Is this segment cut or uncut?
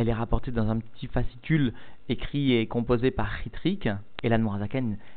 uncut